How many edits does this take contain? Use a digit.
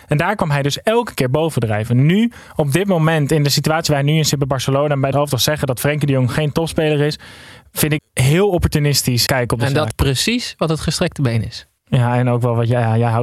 5